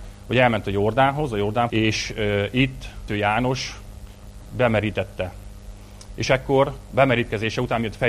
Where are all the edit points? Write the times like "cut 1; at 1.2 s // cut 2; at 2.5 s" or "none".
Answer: cut 1; at 1.7 s // cut 2; at 3.1 s